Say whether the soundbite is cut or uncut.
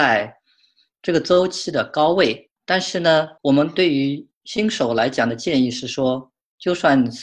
cut